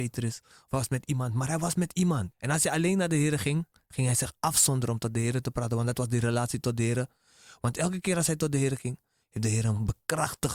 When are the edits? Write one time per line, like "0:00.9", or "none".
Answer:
0:02.3